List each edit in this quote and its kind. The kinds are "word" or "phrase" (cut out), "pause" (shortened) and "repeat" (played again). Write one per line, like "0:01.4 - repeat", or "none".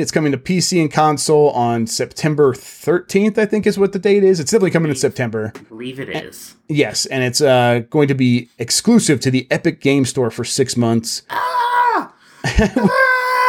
none